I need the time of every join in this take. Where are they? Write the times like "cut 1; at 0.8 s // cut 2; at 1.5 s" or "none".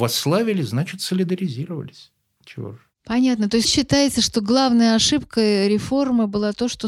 cut 1; at 3.6 s

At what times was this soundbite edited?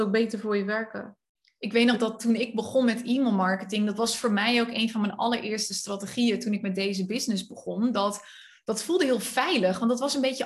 none

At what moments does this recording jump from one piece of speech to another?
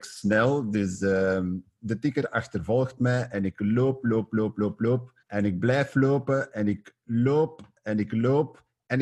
cut 1; at 5.2 s

